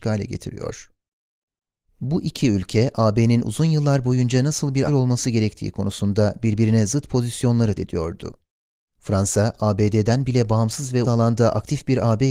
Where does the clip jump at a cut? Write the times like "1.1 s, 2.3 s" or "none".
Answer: 4.9 s, 7.8 s, 11.0 s